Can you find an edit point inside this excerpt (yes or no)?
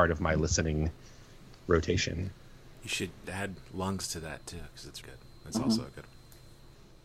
yes